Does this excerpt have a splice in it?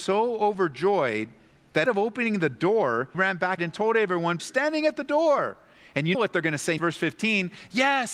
yes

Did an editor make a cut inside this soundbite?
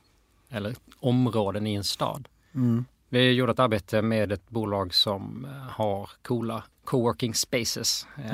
yes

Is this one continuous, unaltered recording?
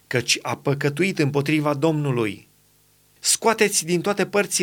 yes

